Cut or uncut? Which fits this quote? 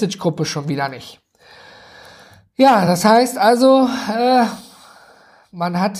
uncut